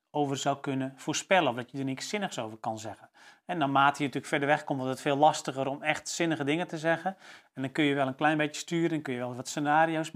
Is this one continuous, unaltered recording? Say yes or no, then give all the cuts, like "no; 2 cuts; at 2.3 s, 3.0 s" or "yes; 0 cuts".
yes; 0 cuts